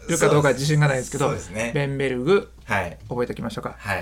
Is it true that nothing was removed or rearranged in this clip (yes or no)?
yes